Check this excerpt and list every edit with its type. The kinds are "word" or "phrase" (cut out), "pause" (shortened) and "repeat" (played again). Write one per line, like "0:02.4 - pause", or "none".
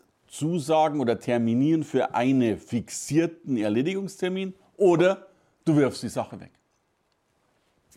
none